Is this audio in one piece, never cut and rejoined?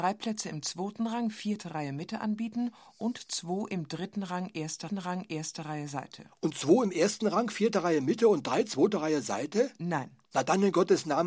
no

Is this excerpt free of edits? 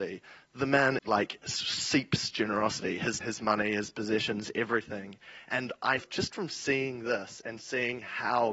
no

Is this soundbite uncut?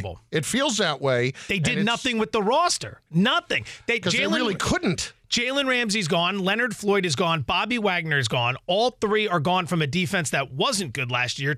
yes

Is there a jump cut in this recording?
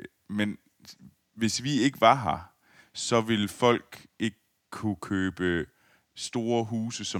no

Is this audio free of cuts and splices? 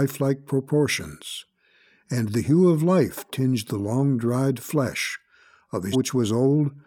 no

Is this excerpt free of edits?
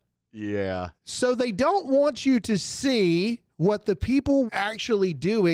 no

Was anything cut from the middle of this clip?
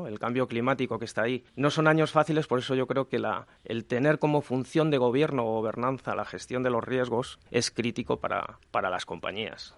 yes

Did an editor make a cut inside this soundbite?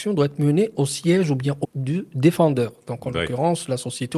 yes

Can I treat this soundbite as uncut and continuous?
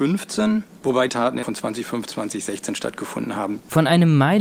no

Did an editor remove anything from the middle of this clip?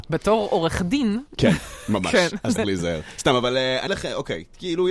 yes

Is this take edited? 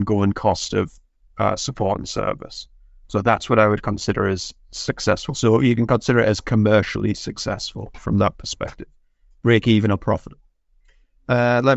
no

